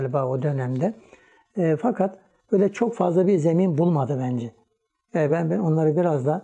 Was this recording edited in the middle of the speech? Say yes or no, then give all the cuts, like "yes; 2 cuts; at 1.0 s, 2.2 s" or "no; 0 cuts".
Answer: no; 0 cuts